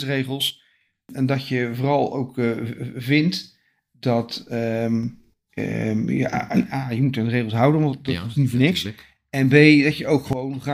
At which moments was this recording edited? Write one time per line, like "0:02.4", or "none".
none